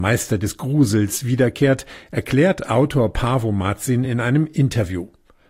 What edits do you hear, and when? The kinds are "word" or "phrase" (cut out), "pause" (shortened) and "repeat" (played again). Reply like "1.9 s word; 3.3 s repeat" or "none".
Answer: none